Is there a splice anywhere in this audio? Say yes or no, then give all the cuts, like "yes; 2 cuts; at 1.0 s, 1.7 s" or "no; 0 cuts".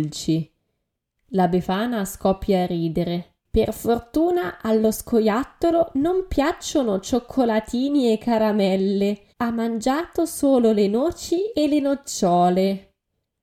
yes; 2 cuts; at 3.4 s, 9.3 s